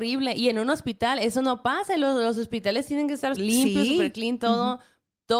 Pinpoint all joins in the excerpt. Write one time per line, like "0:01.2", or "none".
0:03.4